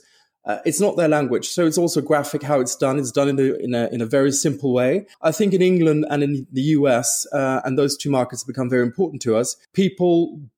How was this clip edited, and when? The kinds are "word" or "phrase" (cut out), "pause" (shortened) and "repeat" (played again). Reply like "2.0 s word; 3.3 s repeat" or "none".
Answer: 5.1 s pause; 9.6 s pause